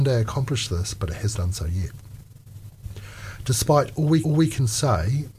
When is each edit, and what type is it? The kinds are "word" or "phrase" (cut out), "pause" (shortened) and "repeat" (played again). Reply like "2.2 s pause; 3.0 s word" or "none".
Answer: 1.4 s word; 4.2 s repeat